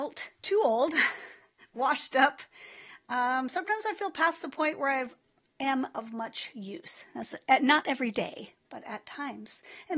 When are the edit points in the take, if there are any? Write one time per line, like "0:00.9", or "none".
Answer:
none